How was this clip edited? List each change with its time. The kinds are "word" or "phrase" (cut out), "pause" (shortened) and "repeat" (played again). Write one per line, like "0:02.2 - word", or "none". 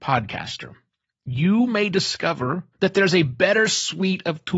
0:02.7 - pause

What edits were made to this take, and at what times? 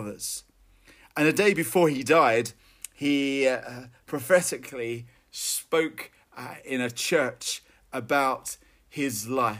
none

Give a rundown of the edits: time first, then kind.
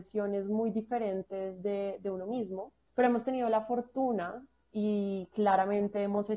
0:02.9 - pause

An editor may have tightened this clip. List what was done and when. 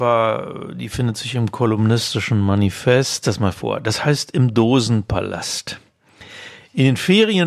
0:03.2 - phrase

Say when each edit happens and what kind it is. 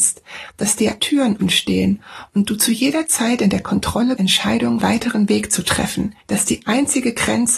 0:01.0 - word
0:01.4 - word
0:04.2 - word
0:04.8 - phrase
0:06.2 - pause

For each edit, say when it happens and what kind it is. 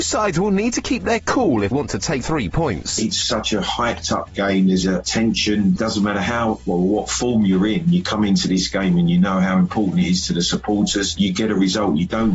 0:01.7 - word
0:02.2 - word
0:03.2 - word
0:04.8 - word

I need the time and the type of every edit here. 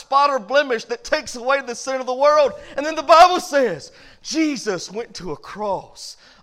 none

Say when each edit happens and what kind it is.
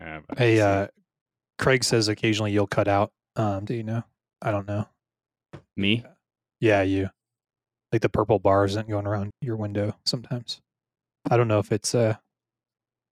0:03.7 - word
0:09.3 - word

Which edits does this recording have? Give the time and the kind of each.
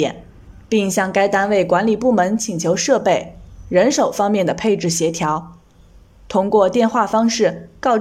none

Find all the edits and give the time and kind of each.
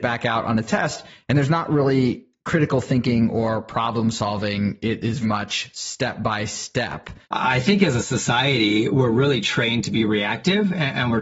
0:05.2 - word
0:07.2 - pause

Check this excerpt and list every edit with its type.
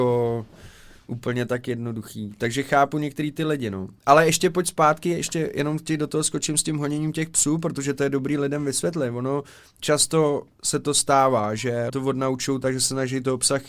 0:11.9 - word

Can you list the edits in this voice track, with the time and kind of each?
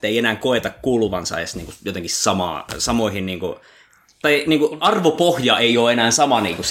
none

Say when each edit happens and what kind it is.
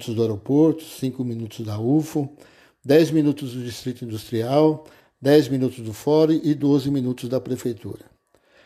none

